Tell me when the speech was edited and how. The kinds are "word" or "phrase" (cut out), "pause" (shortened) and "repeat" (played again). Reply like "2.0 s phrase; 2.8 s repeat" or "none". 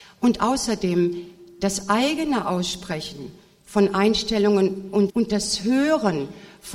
5.1 s word